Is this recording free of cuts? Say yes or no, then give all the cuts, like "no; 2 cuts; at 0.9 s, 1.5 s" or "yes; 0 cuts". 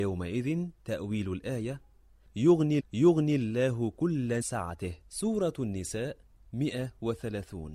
no; 3 cuts; at 2.8 s, 4.4 s, 6.5 s